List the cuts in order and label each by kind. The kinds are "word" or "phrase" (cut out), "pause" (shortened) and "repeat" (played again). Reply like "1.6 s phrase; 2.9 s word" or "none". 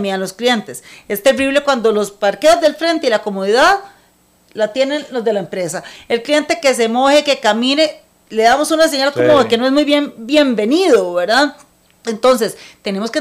none